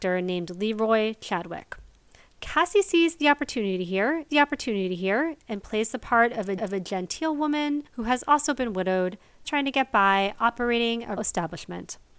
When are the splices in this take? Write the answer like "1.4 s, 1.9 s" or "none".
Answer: 4.3 s, 6.6 s, 7.9 s, 9.4 s, 11.2 s